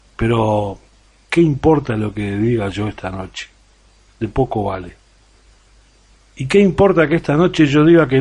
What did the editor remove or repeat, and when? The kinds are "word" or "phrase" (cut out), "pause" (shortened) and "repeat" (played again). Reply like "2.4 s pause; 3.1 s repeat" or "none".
none